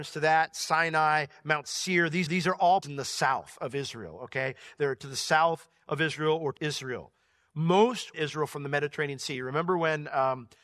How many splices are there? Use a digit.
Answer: 4